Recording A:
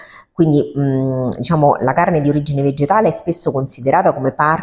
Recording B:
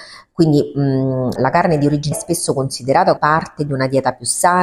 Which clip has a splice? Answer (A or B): B